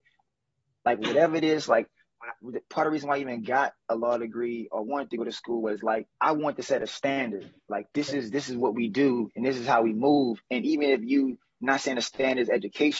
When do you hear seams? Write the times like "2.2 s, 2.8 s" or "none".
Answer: 6.1 s